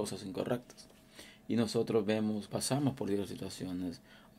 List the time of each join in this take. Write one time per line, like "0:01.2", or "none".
0:02.5